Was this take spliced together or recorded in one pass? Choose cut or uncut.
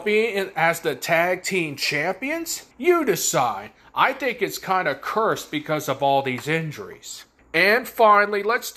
cut